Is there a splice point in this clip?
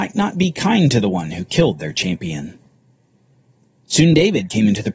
no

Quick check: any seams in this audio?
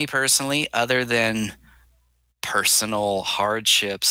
no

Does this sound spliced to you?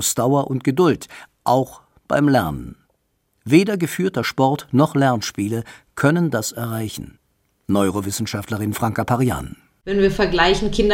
no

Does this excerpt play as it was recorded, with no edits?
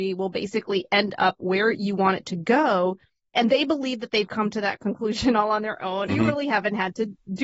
no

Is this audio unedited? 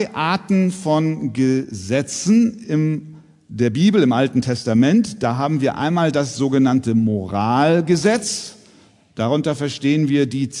yes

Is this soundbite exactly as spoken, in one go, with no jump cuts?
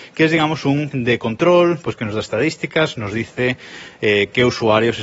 no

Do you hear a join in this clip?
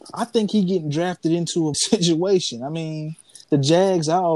yes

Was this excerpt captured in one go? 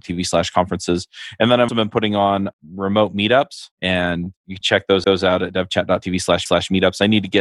no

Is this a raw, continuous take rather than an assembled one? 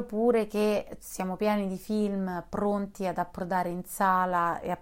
yes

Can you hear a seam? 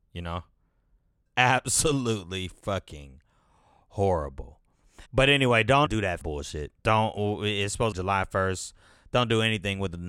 yes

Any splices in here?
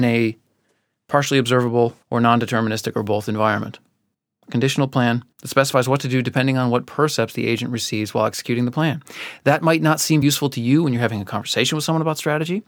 yes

